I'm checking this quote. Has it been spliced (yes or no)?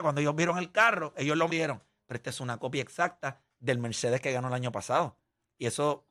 yes